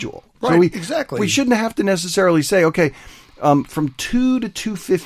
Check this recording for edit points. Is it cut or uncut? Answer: uncut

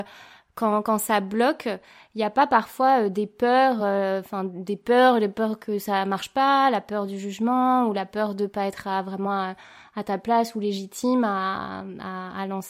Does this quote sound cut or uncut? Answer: uncut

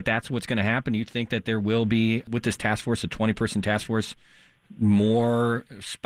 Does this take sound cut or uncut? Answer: uncut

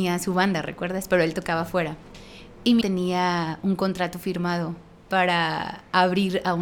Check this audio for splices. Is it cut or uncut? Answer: cut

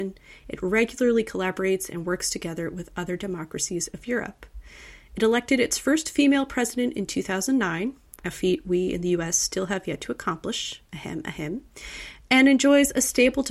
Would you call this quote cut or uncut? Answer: uncut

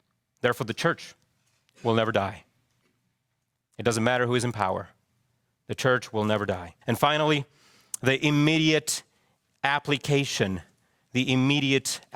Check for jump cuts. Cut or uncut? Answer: cut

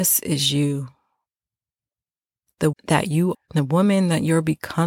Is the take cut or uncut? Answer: cut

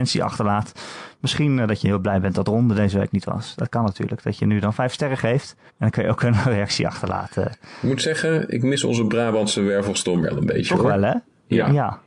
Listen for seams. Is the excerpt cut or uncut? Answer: cut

